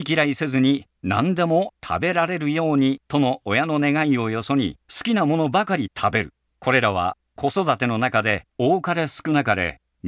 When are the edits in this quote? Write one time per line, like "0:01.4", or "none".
0:03.0
0:04.8
0:06.5
0:08.5